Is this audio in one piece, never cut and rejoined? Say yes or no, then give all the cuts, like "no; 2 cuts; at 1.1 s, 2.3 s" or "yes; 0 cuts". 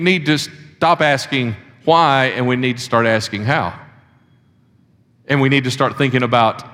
yes; 0 cuts